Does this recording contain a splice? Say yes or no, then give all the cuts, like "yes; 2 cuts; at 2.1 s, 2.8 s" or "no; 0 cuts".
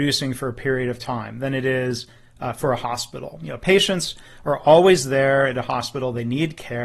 no; 0 cuts